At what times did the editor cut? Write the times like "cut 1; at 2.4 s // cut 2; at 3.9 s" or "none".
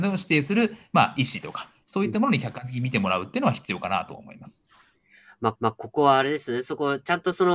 cut 1; at 5.6 s